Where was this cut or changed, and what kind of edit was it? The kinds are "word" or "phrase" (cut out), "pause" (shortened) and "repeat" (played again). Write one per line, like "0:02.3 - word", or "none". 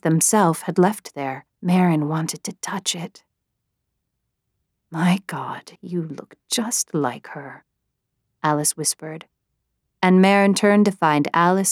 0:01.5 - pause
0:05.8 - pause